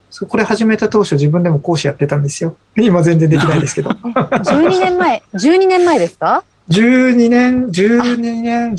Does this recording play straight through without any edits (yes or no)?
no